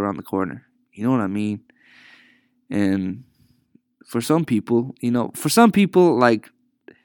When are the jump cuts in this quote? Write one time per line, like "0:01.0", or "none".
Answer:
none

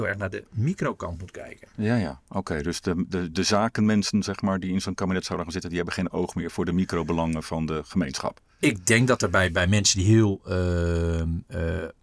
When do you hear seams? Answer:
none

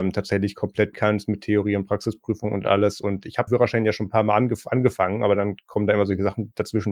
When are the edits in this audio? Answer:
0:00.9
0:03.5

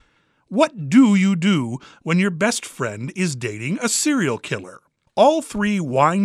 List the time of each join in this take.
0:05.1

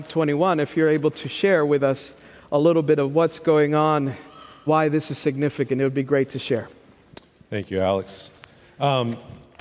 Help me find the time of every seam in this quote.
0:04.7

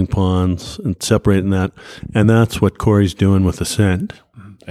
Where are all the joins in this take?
none

